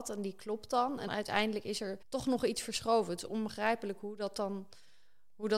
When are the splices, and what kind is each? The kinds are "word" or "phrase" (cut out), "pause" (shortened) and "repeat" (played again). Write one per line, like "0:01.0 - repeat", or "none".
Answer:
0:01.1 - word
0:02.0 - pause